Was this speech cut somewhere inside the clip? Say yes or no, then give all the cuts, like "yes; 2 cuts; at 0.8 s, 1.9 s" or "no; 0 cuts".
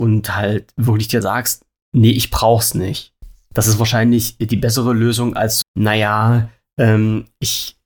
yes; 2 cuts; at 1.2 s, 5.6 s